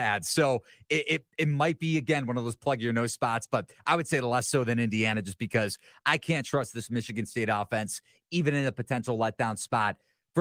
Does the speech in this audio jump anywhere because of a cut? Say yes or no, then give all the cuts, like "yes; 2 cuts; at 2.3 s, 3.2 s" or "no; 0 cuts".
no; 0 cuts